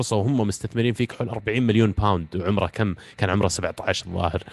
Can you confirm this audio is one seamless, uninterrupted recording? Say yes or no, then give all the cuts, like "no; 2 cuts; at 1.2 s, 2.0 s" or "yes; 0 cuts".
yes; 0 cuts